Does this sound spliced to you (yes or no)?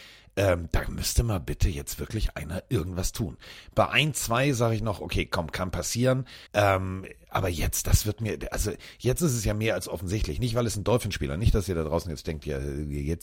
yes